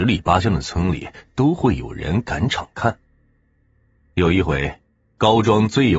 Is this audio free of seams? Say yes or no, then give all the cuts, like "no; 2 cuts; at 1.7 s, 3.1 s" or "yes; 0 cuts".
yes; 0 cuts